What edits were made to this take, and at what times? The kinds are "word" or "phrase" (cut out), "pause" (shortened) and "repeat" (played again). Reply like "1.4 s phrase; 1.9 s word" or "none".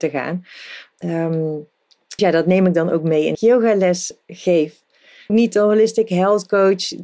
2.2 s word; 3.3 s phrase; 5.3 s phrase